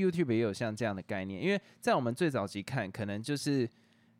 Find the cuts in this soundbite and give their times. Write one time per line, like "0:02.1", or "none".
none